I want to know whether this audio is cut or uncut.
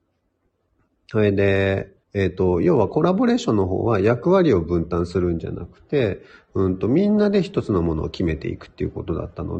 cut